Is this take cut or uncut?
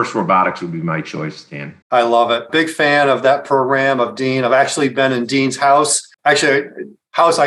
cut